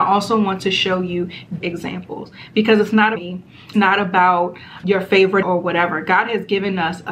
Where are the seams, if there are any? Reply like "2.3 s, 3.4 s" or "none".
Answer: 1.6 s, 3.1 s, 3.7 s, 4.8 s, 5.4 s